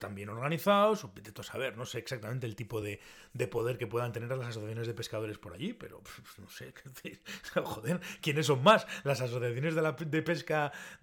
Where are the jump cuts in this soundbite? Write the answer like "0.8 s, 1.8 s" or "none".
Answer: none